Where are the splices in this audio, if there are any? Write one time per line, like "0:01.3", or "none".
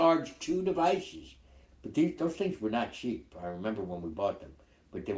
none